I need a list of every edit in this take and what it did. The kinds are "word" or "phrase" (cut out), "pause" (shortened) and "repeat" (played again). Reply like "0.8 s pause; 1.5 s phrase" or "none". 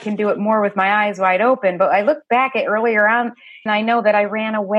3.7 s phrase